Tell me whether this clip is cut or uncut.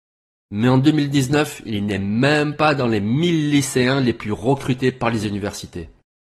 uncut